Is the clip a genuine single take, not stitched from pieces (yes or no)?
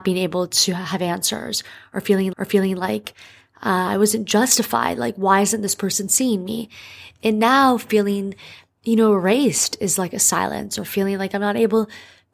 no